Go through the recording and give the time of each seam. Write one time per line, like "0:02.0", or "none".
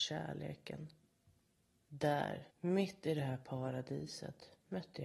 0:02.5